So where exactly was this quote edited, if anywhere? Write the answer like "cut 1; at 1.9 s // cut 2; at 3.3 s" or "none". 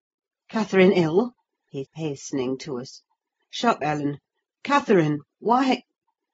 cut 1; at 1.8 s // cut 2; at 3.8 s